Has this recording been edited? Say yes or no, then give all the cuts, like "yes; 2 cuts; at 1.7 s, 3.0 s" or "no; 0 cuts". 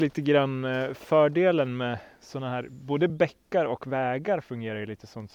no; 0 cuts